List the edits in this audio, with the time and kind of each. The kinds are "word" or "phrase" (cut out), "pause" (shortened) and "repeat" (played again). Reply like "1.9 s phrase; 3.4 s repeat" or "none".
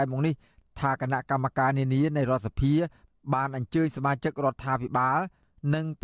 none